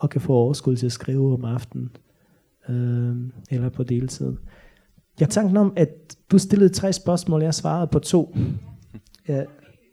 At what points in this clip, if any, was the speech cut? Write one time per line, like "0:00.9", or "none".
0:03.5
0:05.3
0:06.2